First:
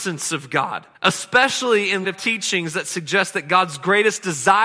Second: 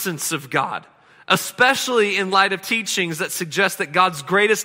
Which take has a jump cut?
first; 2 cuts; at 0.9 s, 2.0 s

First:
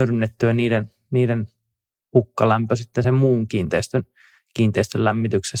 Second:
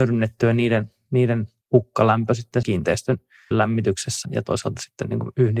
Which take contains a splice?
second; 4 cuts; at 1.6 s, 2.6 s, 3.5 s, 4.2 s

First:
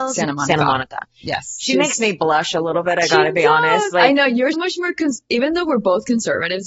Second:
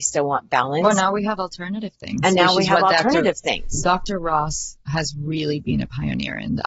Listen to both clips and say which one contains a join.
first; 1 cut; at 4.5 s

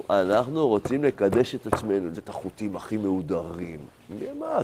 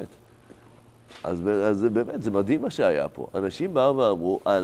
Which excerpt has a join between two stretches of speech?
first; 1 cut; at 2.1 s

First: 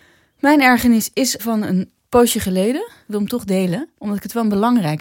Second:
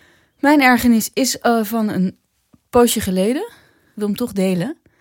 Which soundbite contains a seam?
first; 4 cuts; at 1.4 s, 2.0 s, 3.0 s, 3.9 s

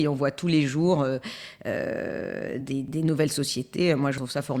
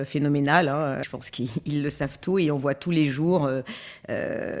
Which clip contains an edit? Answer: second; 1 cut; at 1.0 s

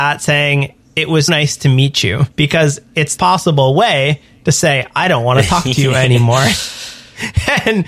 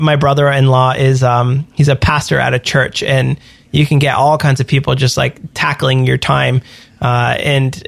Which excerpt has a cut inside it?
first; 3 cuts; at 1.3 s, 2.3 s, 3.2 s

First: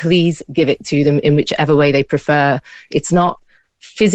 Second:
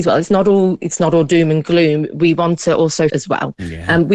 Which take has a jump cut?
second; 1 cut; at 3.1 s

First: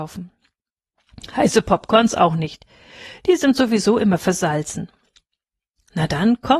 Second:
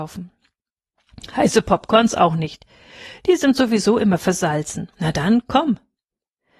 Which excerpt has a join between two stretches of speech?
second; 1 cut; at 4.9 s

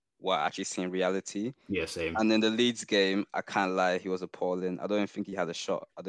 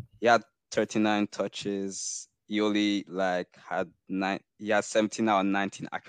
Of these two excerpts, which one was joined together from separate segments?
second; 1 cut; at 4.5 s

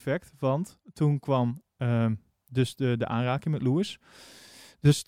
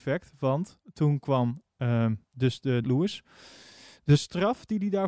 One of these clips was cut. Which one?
second; 2 cuts; at 2.2 s, 2.8 s

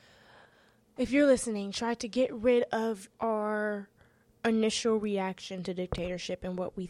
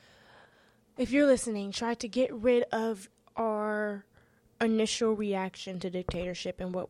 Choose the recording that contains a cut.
first; 1 cut; at 3.1 s

